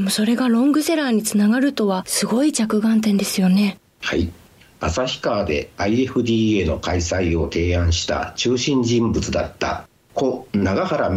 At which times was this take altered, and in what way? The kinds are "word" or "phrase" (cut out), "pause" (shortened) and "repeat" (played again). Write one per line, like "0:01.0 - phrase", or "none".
0:03.9 - pause